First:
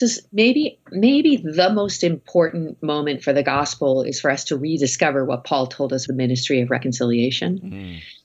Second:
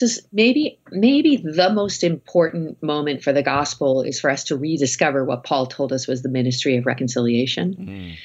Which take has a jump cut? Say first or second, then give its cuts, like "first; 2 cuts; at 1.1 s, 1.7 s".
first; 1 cut; at 6.1 s